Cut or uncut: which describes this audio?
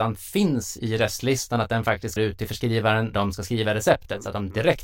cut